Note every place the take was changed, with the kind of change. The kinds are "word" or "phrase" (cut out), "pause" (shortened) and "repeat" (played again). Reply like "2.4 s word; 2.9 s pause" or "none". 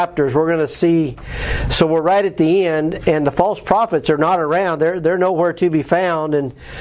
none